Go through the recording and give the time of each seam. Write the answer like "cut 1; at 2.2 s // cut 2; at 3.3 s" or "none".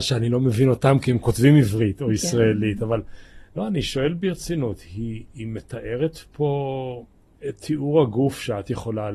cut 1; at 7.3 s